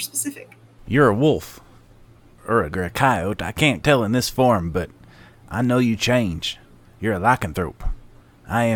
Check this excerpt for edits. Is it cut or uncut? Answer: cut